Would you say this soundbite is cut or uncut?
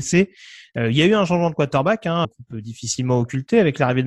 cut